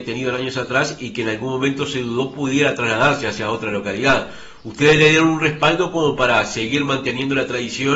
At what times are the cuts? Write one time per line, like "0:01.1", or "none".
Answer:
none